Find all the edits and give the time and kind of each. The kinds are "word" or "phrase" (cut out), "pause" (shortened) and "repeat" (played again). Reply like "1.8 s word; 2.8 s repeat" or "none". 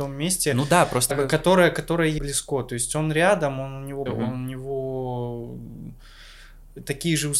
1.1 s word; 2.2 s word; 4.1 s phrase

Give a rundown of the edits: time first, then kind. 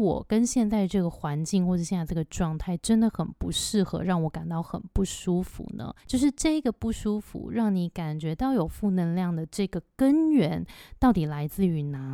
6.0 s pause

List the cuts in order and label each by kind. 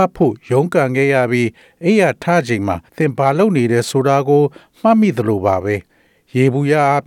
2.9 s pause

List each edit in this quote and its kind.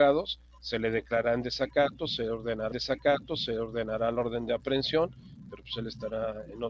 2.7 s repeat

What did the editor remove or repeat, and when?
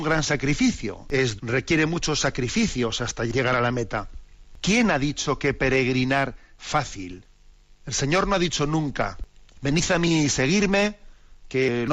1.4 s word; 6.6 s word

